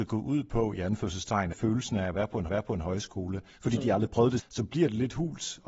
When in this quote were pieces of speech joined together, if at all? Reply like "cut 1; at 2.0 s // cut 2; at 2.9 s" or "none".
cut 1; at 1.5 s // cut 2; at 2.5 s // cut 3; at 4.4 s